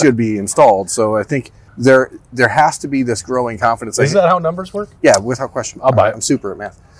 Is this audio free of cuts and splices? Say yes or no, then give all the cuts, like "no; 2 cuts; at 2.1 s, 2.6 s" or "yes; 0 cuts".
no; 1 cut; at 1.7 s